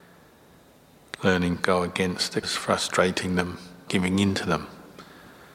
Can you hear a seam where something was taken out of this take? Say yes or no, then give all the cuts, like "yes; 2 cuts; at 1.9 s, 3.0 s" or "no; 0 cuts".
yes; 3 cuts; at 1.6 s, 2.4 s, 3.9 s